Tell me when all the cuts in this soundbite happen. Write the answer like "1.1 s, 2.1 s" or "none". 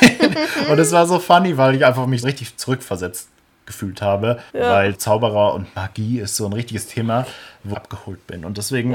2.2 s, 4.5 s, 4.9 s, 7.7 s